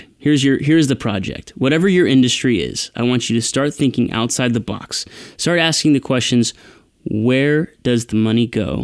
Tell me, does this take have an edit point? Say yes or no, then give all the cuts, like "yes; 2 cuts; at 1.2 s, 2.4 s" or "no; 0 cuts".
no; 0 cuts